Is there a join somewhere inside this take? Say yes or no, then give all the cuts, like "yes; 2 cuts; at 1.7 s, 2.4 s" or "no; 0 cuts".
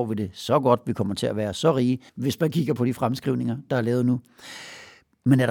yes; 1 cut; at 2.1 s